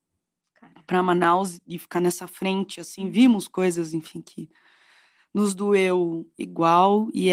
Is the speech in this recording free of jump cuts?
yes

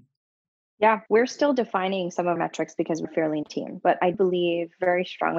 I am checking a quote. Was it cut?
yes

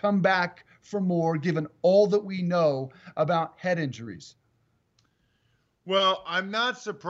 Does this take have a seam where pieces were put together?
no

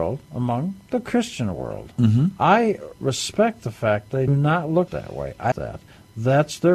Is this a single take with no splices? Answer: no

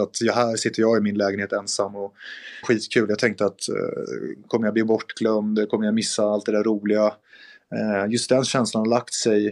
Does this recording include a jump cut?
yes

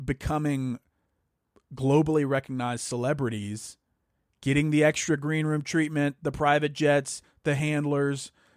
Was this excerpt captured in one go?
yes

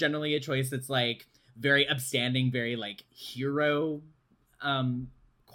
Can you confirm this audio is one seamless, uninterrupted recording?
yes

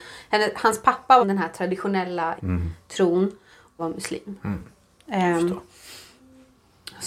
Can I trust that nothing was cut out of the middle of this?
no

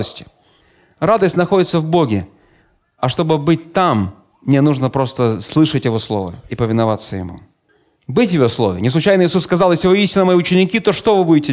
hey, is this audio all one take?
yes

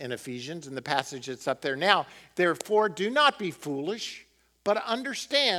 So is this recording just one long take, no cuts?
yes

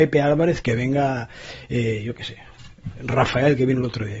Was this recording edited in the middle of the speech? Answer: no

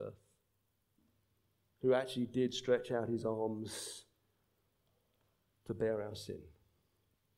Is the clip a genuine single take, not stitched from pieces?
yes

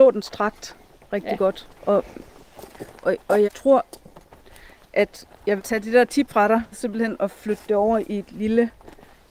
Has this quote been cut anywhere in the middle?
yes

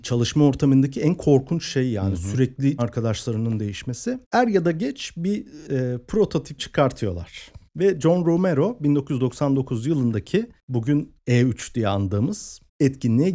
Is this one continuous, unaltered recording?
no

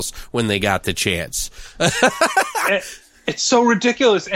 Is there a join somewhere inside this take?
no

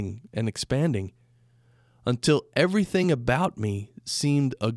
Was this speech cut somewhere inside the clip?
no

